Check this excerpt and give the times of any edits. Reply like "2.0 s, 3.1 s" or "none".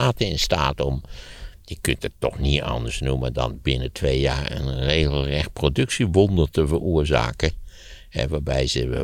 none